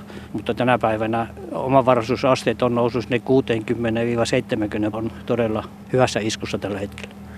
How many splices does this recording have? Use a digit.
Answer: 1